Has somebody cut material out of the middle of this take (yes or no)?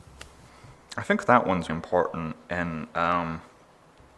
yes